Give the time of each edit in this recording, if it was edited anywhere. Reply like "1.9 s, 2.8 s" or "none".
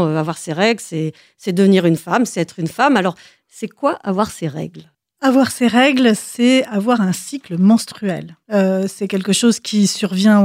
8.4 s